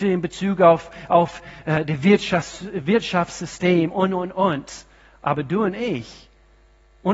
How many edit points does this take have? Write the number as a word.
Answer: zero